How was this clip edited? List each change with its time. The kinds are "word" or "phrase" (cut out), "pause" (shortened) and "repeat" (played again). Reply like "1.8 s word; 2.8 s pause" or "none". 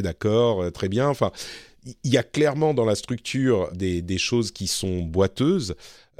3.7 s word